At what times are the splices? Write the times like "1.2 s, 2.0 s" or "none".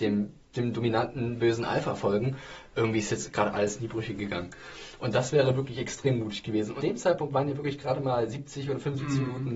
6.8 s